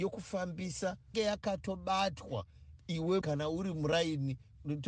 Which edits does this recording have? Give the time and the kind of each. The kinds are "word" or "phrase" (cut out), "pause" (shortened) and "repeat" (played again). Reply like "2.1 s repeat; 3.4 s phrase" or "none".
1.1 s phrase; 3.2 s word